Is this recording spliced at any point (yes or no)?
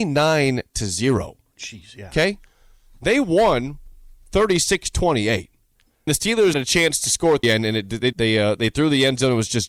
yes